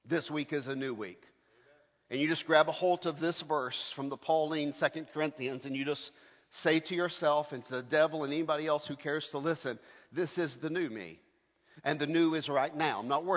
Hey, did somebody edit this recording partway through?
no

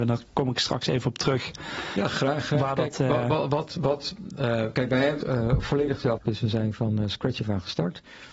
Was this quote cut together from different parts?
yes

